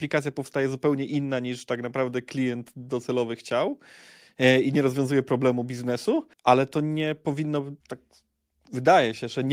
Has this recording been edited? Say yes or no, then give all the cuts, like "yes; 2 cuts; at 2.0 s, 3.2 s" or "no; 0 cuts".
yes; 2 cuts; at 6.3 s, 7.8 s